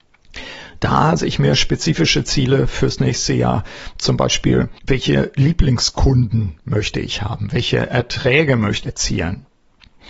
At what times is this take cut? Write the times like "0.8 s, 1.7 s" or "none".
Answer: 1.2 s, 4.8 s, 8.8 s

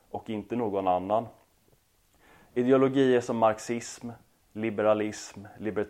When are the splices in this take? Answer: none

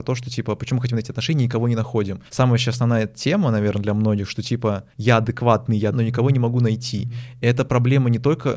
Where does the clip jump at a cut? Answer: 2.3 s, 4.9 s, 5.9 s

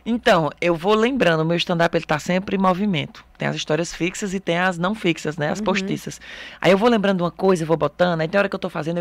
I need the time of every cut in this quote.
none

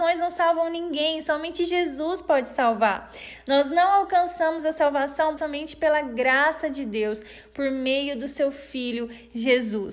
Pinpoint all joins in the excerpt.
5.4 s

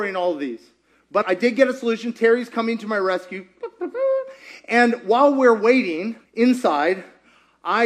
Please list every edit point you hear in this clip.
1.2 s, 6.3 s

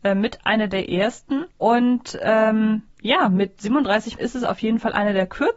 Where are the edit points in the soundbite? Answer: 1.5 s, 2.9 s, 4.2 s

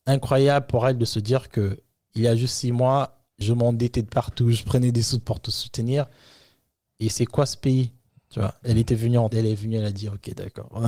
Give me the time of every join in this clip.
3.3 s, 5.2 s, 9.3 s

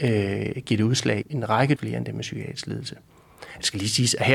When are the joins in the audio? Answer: 1.2 s, 1.8 s

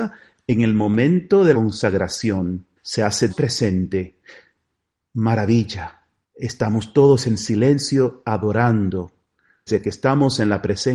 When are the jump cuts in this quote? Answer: 1.5 s, 2.8 s, 3.3 s, 6.2 s, 9.7 s

